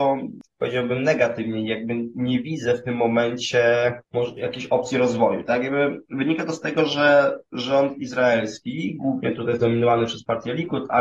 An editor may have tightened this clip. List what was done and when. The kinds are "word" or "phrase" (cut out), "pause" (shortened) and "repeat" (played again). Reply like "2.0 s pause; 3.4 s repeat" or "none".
4.0 s pause